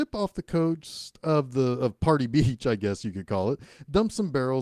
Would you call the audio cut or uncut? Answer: uncut